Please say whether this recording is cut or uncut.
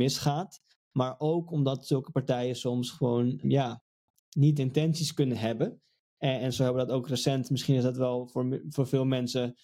cut